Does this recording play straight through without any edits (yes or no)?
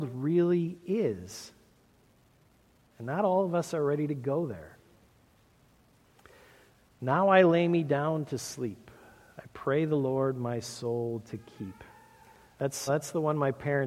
no